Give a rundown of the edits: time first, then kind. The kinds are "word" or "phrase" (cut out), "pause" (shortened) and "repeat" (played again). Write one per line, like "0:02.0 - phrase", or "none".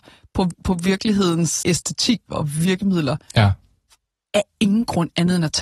0:01.6 - word
0:02.3 - word